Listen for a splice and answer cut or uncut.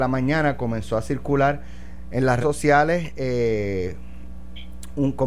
cut